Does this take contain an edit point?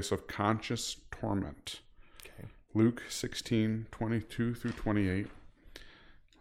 no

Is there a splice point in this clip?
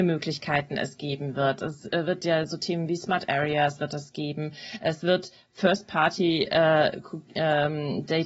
no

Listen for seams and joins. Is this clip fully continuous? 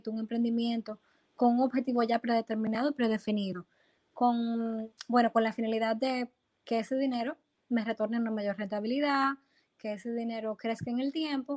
yes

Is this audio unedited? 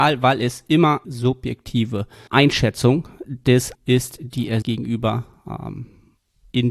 no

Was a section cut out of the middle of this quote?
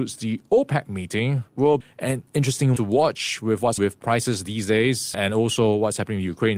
yes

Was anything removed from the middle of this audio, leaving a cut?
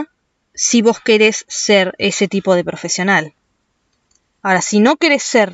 no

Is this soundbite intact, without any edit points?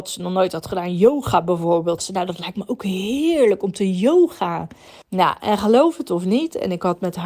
no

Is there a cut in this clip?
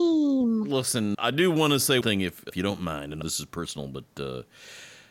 yes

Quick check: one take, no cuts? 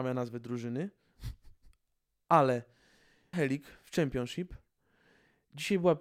no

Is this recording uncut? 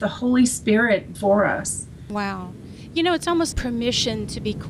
no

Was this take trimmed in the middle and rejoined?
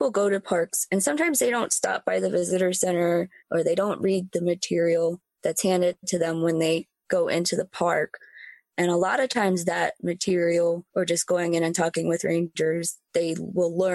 yes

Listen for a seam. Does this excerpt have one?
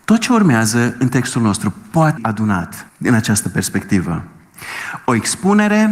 yes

